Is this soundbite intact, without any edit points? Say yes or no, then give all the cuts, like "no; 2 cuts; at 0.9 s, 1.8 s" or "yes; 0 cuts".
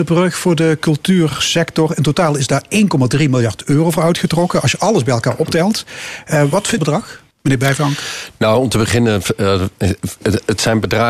no; 2 cuts; at 6.8 s, 7.3 s